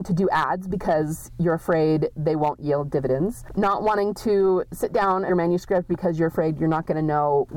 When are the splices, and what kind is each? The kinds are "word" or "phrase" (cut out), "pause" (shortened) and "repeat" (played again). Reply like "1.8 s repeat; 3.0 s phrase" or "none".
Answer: 5.3 s phrase